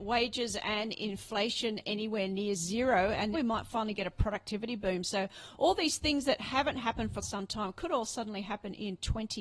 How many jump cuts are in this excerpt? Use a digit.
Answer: 2